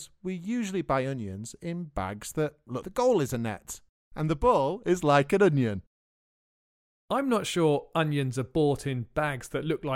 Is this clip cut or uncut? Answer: cut